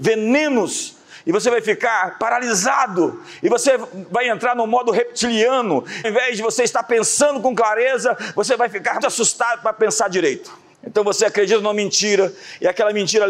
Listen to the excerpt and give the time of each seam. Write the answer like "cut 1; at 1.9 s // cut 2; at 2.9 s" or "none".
cut 1; at 6.0 s // cut 2; at 9.0 s // cut 3; at 10.7 s